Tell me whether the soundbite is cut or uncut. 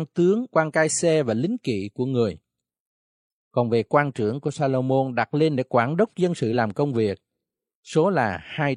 uncut